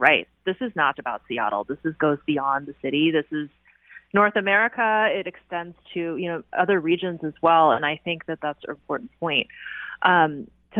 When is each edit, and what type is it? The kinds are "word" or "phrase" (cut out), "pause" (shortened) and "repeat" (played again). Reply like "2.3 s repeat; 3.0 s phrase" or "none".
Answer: 0.9 s word; 8.7 s word